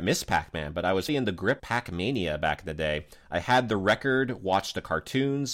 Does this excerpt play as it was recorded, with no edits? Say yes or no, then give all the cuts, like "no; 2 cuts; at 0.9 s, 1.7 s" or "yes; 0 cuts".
no; 2 cuts; at 1.1 s, 1.6 s